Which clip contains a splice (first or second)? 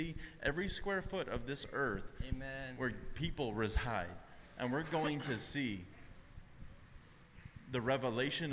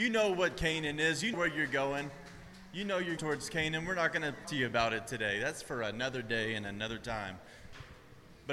second